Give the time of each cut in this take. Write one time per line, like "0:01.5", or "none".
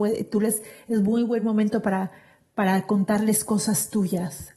none